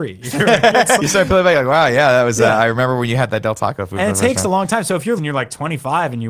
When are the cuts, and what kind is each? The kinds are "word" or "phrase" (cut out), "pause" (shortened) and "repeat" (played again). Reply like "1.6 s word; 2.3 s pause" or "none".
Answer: 1.0 s word; 5.2 s phrase